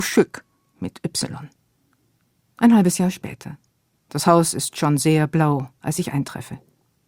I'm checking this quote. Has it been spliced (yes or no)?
no